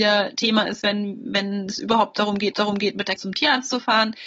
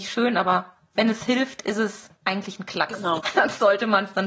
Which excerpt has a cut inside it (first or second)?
first